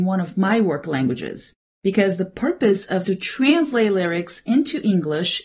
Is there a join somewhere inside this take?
yes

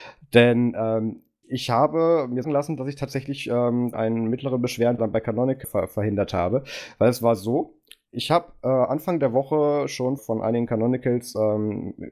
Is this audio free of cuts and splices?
no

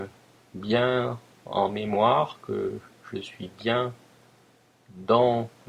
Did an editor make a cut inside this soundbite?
no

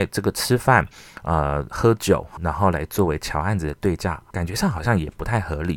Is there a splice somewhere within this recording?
yes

